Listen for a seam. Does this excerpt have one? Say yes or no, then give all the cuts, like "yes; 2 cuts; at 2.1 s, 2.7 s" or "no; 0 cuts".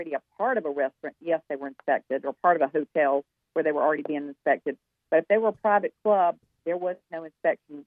no; 0 cuts